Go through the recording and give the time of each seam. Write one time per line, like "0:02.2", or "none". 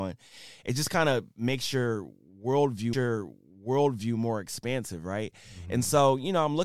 0:02.9